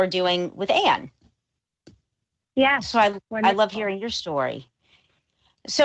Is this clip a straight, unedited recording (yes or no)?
yes